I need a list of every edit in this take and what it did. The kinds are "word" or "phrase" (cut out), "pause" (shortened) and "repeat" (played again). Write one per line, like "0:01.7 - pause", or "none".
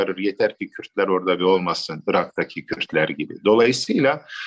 0:01.4 - phrase